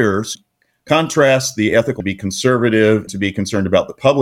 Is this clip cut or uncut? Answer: cut